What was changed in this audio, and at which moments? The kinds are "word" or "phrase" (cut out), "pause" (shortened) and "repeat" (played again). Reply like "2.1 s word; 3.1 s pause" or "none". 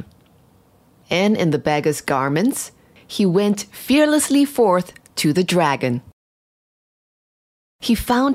none